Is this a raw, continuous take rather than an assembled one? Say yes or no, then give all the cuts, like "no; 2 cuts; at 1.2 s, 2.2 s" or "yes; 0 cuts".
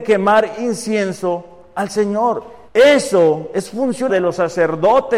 no; 2 cuts; at 2.7 s, 4.1 s